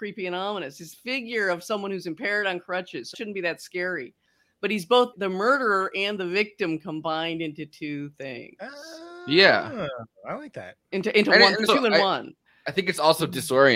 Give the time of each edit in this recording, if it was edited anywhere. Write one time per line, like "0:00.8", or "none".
0:00.9
0:03.1
0:05.1
0:11.7